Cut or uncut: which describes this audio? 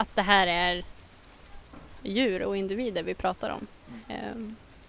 uncut